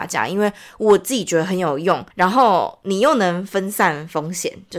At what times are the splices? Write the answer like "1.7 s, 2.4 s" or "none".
2.1 s